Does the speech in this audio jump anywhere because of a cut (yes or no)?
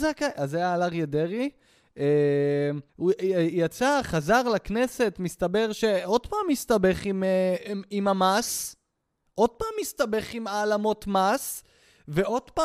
yes